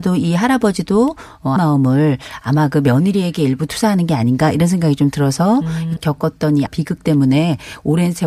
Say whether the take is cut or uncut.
cut